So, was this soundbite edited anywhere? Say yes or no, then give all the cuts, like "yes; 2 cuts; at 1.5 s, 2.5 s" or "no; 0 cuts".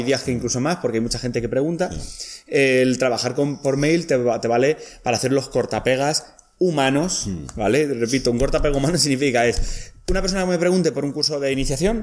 no; 0 cuts